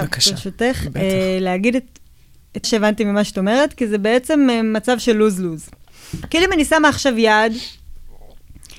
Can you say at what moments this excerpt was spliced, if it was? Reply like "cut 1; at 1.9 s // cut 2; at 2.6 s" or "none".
cut 1; at 2.6 s